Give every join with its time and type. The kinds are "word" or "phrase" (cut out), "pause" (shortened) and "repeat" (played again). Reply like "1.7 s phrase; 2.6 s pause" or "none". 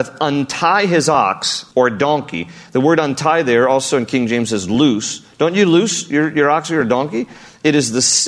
1.7 s pause